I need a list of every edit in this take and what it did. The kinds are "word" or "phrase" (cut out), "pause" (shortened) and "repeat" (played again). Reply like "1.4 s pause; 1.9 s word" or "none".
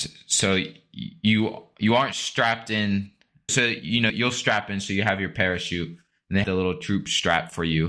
3.5 s word; 4.1 s word; 6.4 s word